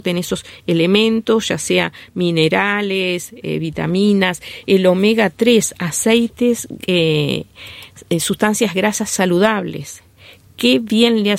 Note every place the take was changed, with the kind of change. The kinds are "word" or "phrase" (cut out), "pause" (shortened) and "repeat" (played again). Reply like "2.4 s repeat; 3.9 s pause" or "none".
none